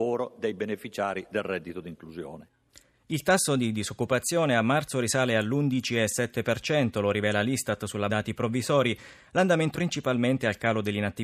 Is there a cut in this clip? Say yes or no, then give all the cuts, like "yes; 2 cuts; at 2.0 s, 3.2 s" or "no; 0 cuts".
yes; 2 cuts; at 8.1 s, 9.7 s